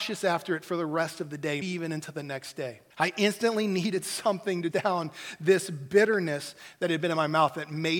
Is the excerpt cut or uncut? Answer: cut